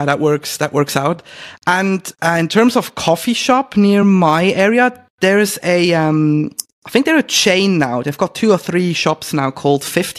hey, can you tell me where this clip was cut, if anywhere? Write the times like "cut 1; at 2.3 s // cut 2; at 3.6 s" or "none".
none